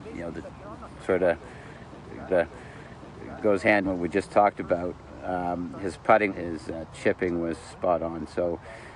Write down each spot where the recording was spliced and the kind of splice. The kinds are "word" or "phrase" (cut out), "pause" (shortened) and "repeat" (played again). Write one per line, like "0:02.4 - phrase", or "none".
0:02.3 - repeat
0:03.8 - phrase
0:06.3 - phrase

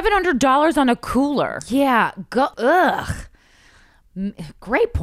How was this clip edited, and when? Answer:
0:02.5 - pause

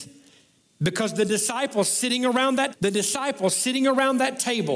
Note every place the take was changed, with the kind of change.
0:02.7 - word

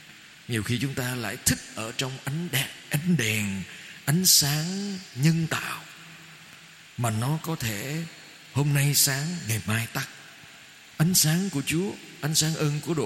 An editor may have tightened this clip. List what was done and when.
none

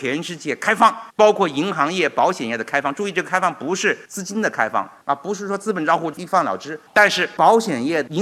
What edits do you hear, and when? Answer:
0:01.1 - pause

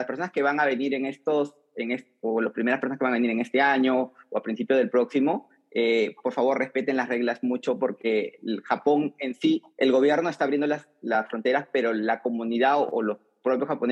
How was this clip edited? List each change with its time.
0:09.7 - pause

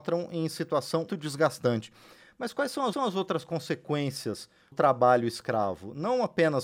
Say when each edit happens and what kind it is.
0:01.1 - word
0:02.9 - repeat
0:04.7 - word

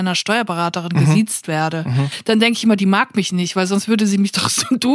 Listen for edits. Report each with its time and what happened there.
none

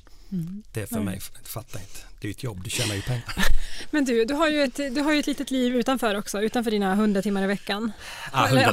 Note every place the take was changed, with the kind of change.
none

